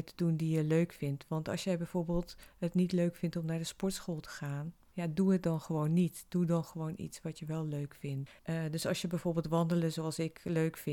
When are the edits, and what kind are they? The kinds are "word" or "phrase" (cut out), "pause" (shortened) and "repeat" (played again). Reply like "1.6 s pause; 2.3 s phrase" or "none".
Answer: 8.4 s pause